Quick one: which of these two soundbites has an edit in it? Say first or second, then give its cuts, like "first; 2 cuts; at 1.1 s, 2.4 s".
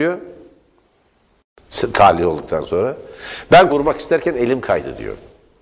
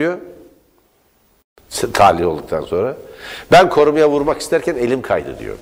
first; 1 cut; at 3.7 s